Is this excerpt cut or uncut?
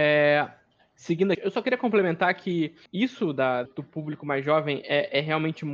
cut